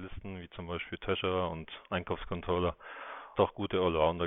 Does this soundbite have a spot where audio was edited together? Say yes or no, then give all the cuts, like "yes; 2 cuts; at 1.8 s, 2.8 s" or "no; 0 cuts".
yes; 1 cut; at 3.4 s